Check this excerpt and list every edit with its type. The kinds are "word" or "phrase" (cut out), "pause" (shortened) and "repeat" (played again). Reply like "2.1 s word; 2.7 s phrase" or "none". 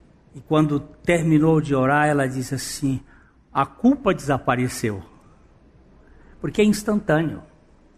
none